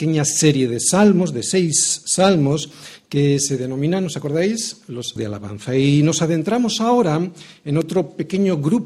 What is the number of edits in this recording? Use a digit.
1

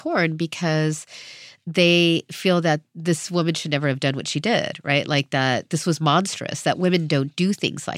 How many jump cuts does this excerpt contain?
1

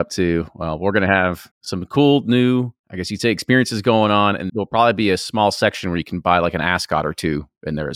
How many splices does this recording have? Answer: 3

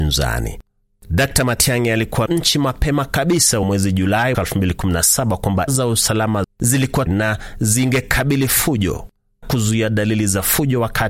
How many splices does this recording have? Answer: 7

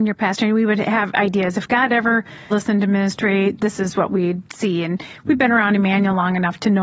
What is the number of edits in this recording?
2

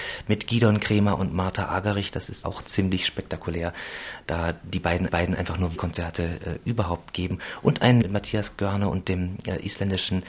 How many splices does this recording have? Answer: 4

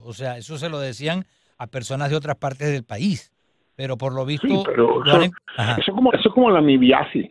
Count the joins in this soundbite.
1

